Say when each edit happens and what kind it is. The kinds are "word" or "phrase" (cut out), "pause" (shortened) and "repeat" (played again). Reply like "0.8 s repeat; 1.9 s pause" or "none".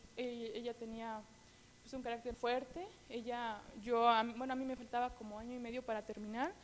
2.3 s word